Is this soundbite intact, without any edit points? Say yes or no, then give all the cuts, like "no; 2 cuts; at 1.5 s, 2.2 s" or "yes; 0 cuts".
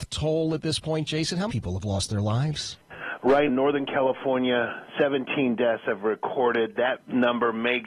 no; 2 cuts; at 1.5 s, 3.5 s